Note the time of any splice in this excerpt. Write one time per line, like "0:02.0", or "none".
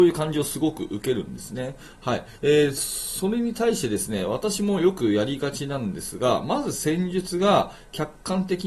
0:02.4